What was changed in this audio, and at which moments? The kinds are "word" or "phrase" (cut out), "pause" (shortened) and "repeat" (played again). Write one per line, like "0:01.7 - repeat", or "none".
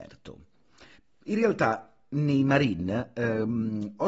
0:00.9 - pause

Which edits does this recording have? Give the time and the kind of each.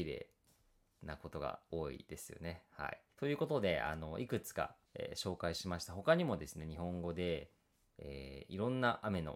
0:03.1 - pause
0:04.8 - pause

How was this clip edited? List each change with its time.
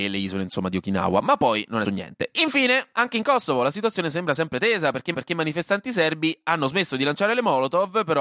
0:01.8 - word
0:05.1 - repeat

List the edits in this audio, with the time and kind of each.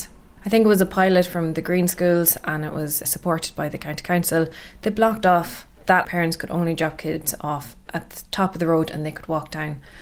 0:03.0 - word
0:06.0 - phrase

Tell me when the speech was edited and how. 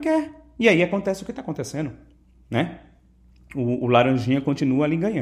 none

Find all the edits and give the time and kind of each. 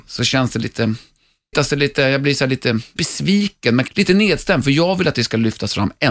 0:01.5 - word
0:03.0 - word
0:03.9 - word

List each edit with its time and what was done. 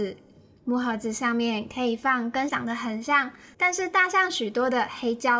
0:02.5 - word

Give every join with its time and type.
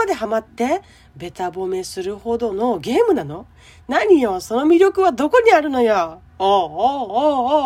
0:06.3 - pause

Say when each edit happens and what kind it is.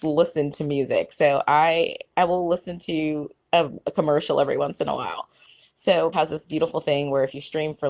0:06.1 - word

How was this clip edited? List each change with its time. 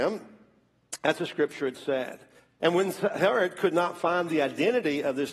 0:02.4 - pause

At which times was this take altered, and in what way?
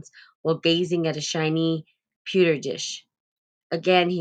none

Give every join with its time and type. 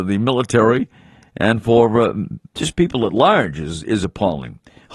0:02.5 - pause

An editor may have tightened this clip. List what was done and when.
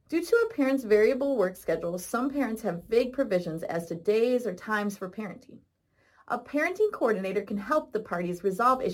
none

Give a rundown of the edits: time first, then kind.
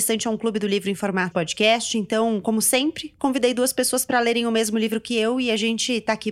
0:01.3 - word

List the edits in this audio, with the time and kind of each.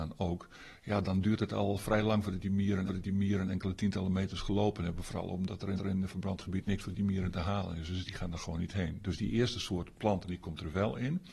0:02.9 - repeat
0:05.8 - repeat

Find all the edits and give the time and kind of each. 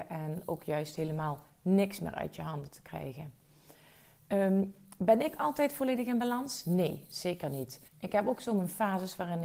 0:07.9 - pause

